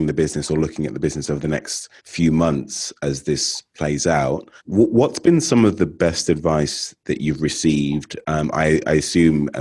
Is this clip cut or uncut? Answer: cut